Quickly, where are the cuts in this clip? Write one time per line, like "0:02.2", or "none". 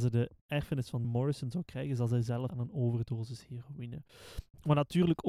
0:01.0
0:02.5